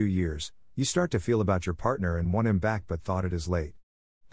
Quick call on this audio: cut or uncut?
uncut